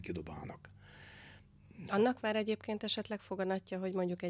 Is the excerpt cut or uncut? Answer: cut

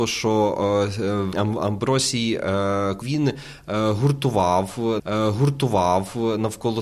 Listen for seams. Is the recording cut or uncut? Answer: cut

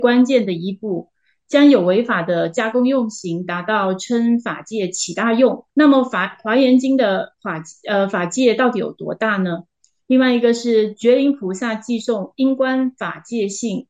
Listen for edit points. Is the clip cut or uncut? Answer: cut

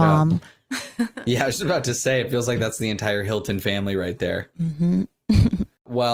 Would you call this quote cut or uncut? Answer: uncut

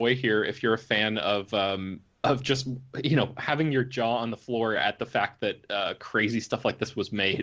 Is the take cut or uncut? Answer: uncut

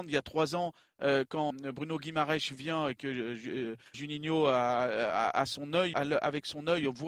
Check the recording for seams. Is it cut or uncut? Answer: cut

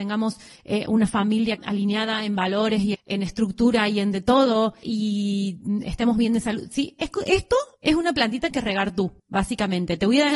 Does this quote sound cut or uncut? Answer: cut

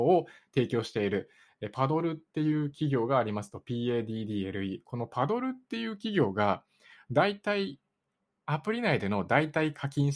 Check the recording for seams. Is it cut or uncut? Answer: uncut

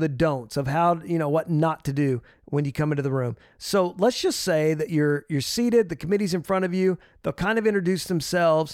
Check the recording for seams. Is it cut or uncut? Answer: uncut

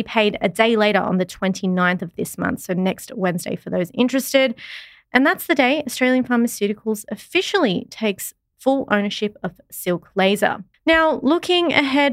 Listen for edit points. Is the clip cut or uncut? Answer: cut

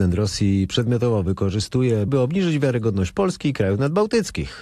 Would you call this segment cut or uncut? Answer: cut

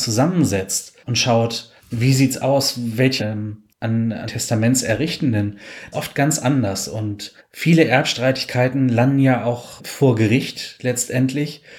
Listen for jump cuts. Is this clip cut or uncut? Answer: cut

